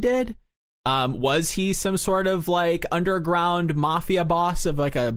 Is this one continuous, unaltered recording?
yes; 0 cuts

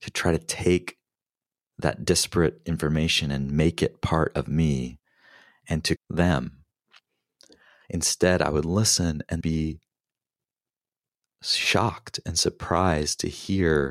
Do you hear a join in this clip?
yes; 2 cuts; at 6.0 s, 9.4 s

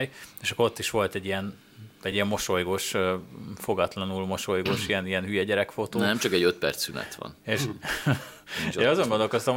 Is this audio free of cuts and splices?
yes; 0 cuts

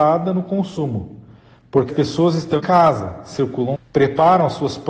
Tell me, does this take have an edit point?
yes; 3 cuts; at 1.9 s, 2.6 s, 3.7 s

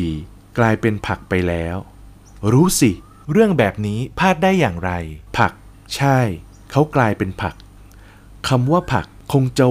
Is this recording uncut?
no; 1 cut; at 5.3 s

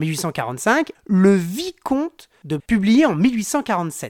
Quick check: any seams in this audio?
yes; 2 cuts; at 0.9 s, 2.6 s

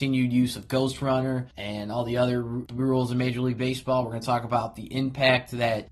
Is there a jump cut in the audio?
no; 0 cuts

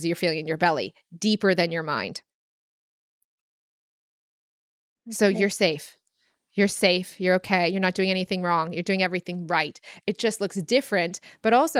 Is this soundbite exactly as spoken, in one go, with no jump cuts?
yes; 0 cuts

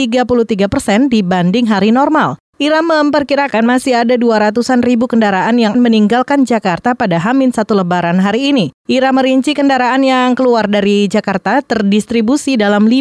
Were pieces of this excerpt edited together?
yes; 1 cut; at 5.7 s

